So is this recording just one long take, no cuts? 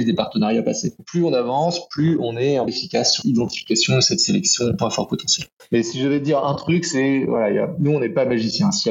no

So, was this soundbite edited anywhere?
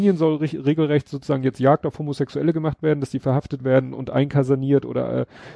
no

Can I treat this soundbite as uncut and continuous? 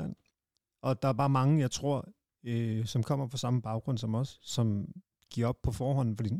yes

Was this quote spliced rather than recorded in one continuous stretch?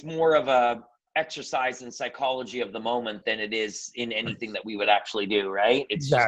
no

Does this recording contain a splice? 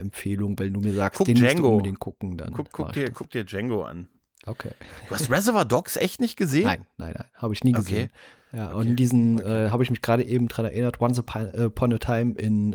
no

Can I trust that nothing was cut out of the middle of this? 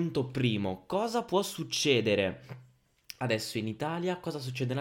yes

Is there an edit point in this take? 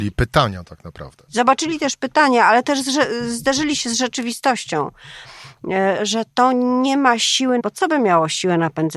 yes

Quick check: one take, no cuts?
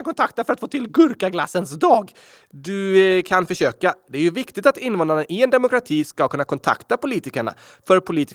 yes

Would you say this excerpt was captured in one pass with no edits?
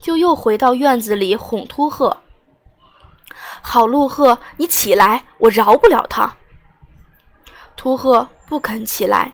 yes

